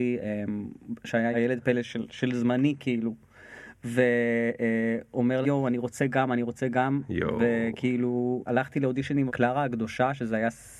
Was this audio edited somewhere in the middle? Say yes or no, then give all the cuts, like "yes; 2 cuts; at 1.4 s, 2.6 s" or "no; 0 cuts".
yes; 4 cuts; at 1.3 s, 5.4 s, 8.5 s, 9.3 s